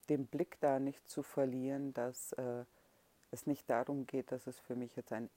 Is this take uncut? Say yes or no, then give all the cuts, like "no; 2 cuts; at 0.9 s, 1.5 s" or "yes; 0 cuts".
yes; 0 cuts